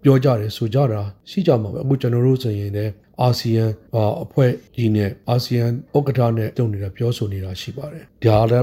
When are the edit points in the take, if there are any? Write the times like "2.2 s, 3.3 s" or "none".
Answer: 6.5 s